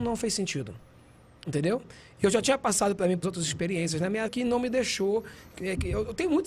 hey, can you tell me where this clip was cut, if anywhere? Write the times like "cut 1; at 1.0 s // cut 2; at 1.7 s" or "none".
cut 1; at 3.2 s // cut 2; at 4.3 s

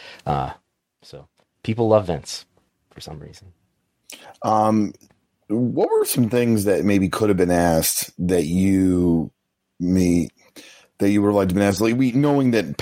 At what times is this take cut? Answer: none

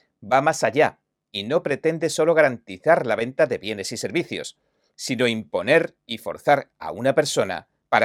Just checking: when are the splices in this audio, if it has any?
none

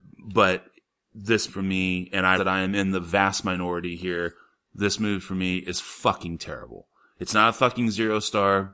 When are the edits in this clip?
cut 1; at 1.5 s // cut 2; at 2.4 s

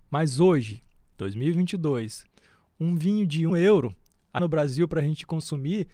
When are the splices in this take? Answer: cut 1; at 3.5 s // cut 2; at 4.4 s

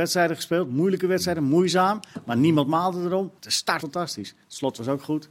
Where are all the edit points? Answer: cut 1; at 3.4 s // cut 2; at 3.8 s

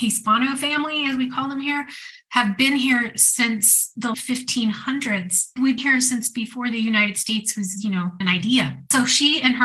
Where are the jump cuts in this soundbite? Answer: cut 1; at 4.1 s // cut 2; at 5.8 s // cut 3; at 8.2 s

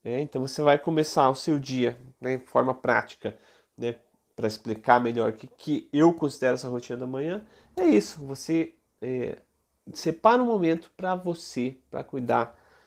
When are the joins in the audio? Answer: none

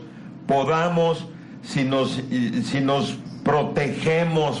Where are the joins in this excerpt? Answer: none

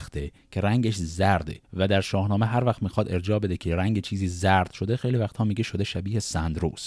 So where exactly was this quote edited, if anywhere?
cut 1; at 1.6 s

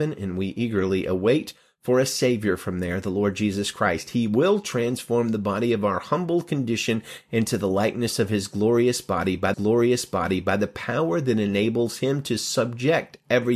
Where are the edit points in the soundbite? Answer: cut 1; at 9.5 s

